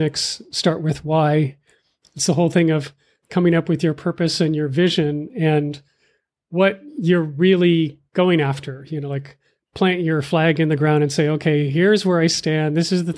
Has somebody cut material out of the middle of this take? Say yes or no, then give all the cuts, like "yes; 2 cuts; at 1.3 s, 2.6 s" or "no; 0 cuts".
no; 0 cuts